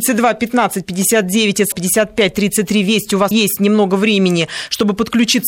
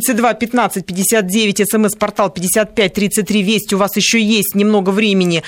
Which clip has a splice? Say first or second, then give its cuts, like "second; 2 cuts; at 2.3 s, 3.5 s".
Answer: first; 2 cuts; at 1.7 s, 3.3 s